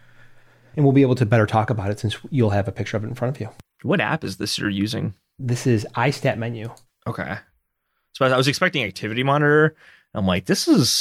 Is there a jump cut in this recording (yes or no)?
no